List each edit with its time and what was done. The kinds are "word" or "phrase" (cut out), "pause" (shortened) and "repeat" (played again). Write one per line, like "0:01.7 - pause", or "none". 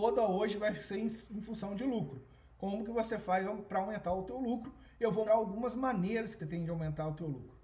0:05.3 - word
0:06.4 - word